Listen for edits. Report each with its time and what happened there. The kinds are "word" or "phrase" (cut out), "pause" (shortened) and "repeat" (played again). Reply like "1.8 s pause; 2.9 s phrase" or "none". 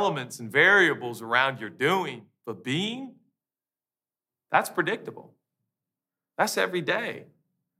none